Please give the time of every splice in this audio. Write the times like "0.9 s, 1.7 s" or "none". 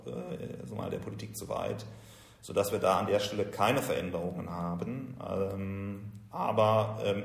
none